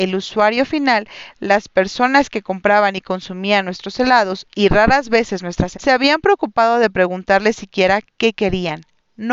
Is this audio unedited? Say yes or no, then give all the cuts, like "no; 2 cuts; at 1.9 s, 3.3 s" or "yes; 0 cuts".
no; 1 cut; at 5.7 s